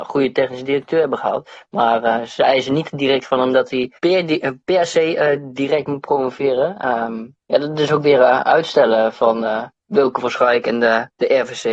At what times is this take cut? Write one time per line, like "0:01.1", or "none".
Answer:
0:04.0
0:07.4